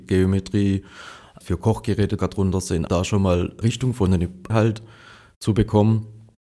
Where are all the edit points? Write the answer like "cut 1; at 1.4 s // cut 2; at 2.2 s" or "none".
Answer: cut 1; at 1.4 s // cut 2; at 2.2 s // cut 3; at 2.9 s // cut 4; at 3.6 s // cut 5; at 4.5 s